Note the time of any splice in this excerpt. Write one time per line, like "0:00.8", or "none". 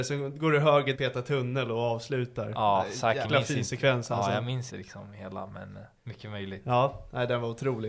0:00.9
0:03.2
0:04.7
0:06.0